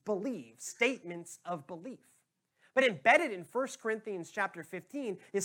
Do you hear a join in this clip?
no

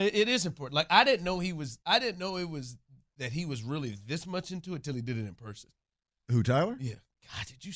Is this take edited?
yes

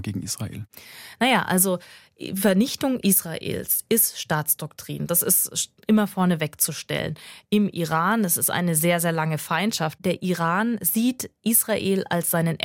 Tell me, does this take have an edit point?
no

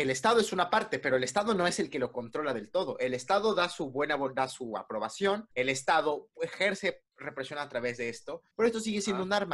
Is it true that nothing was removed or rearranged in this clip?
no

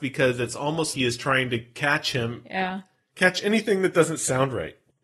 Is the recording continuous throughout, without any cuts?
no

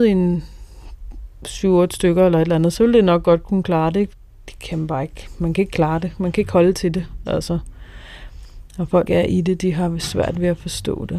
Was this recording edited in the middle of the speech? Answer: yes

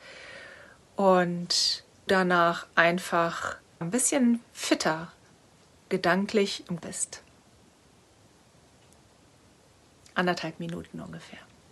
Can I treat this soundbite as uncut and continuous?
no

